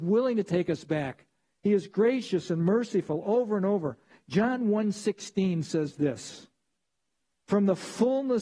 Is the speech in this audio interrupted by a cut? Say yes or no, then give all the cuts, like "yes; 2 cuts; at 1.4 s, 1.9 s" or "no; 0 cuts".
no; 0 cuts